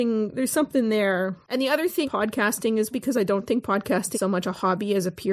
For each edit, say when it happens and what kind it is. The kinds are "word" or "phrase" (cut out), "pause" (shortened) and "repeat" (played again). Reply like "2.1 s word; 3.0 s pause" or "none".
2.0 s word; 2.9 s word; 4.1 s word